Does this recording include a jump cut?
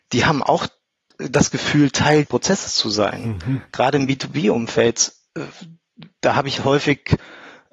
yes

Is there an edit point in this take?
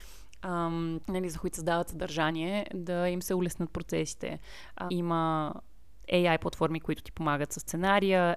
yes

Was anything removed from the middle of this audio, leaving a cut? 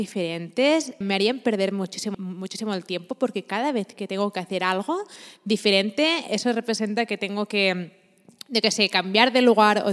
yes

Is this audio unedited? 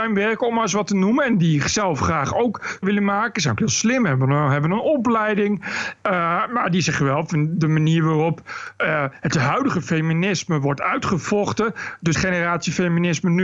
no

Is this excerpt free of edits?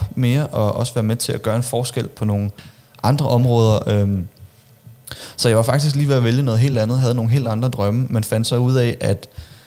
yes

